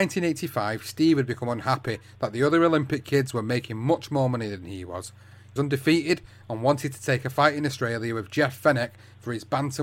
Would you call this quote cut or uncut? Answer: cut